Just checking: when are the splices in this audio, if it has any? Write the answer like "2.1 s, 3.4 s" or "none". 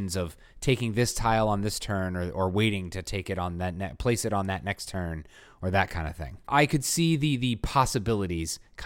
none